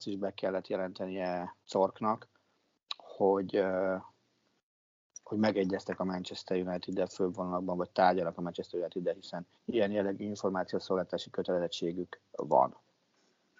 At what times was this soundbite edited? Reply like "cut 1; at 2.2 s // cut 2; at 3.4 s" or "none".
cut 1; at 1.6 s // cut 2; at 9.6 s